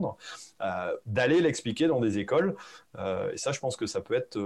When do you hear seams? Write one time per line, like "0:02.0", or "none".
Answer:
none